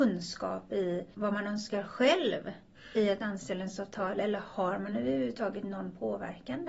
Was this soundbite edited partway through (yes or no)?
no